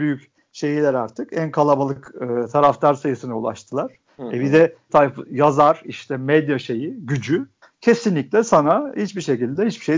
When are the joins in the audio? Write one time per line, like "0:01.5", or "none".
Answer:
0:04.9